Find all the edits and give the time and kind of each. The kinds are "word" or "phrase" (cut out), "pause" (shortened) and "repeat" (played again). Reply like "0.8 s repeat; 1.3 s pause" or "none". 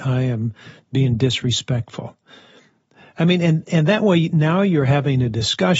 none